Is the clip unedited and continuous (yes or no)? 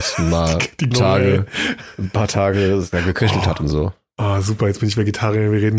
no